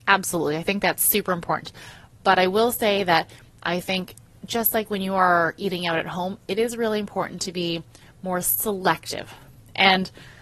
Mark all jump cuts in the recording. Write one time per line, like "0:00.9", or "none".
none